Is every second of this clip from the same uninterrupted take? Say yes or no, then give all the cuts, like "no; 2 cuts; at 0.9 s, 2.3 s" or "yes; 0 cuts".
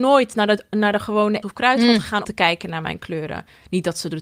no; 2 cuts; at 1.4 s, 2.2 s